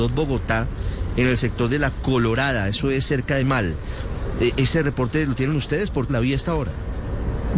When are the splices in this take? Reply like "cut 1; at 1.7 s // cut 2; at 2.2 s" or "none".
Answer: cut 1; at 3.4 s // cut 2; at 6.1 s